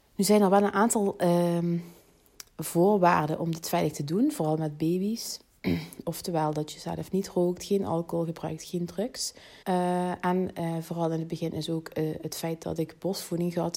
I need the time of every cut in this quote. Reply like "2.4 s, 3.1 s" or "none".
9.6 s

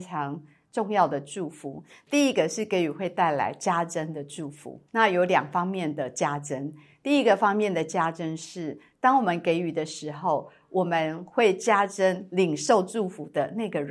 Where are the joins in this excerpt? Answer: 4.9 s

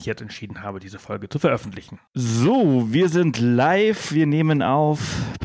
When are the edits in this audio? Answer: 2.1 s

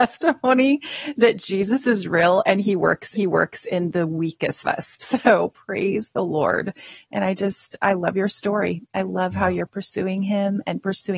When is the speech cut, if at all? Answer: 3.1 s, 4.6 s

